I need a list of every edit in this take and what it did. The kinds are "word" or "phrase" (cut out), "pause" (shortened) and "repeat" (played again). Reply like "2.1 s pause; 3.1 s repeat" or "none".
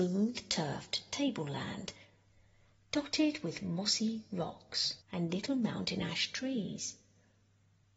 5.0 s pause